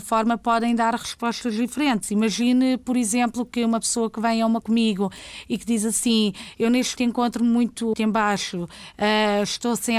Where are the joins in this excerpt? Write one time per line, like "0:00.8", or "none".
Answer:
0:04.6
0:07.0
0:07.9